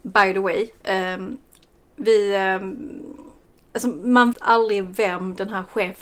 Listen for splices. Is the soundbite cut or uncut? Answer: cut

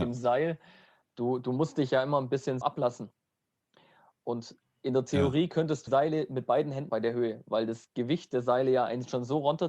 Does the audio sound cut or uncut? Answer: cut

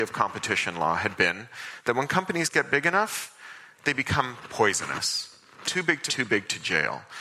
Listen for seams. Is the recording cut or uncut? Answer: cut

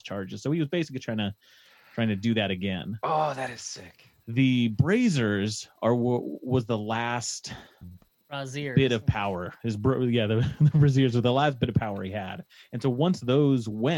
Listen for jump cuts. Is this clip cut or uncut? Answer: uncut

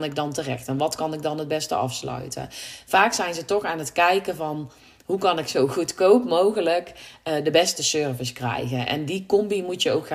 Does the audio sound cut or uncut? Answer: uncut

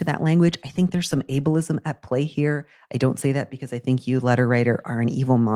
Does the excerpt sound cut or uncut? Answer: uncut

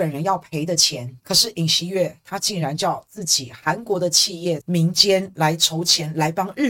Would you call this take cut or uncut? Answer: cut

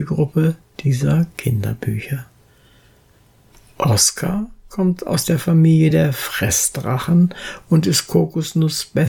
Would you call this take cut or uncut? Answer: uncut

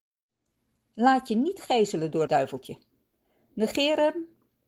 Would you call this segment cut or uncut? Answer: cut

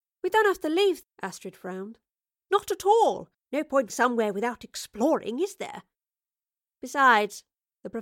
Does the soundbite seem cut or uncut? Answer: cut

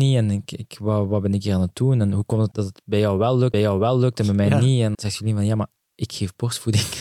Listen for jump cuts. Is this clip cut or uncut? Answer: cut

